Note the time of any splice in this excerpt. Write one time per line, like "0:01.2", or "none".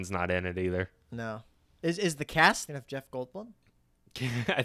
0:02.7